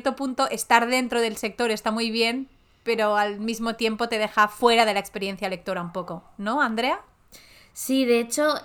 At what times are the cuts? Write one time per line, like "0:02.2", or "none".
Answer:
none